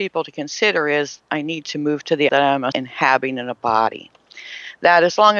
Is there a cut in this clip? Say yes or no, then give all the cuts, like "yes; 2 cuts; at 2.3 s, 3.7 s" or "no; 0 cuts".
yes; 3 cuts; at 1.2 s, 2.3 s, 2.7 s